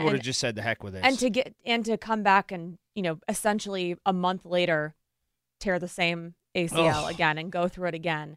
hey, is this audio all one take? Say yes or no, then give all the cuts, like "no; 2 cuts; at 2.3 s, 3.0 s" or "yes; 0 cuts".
yes; 0 cuts